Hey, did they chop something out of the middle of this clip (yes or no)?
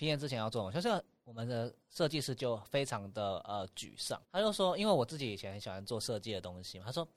yes